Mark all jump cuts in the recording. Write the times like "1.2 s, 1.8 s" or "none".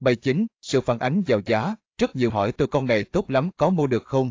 2.3 s